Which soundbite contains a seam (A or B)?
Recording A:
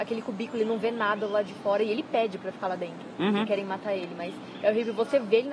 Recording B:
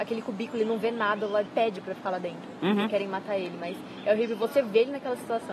B